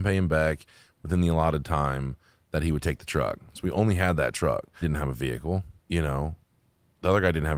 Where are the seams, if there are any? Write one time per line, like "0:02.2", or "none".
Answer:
0:04.8
0:05.8